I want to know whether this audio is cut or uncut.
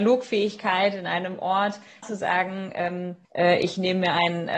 cut